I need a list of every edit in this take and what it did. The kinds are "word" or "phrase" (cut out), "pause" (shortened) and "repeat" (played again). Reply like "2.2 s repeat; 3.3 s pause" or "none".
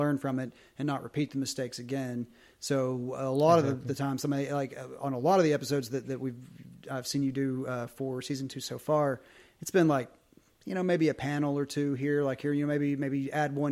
none